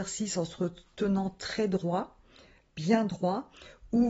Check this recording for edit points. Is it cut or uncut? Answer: uncut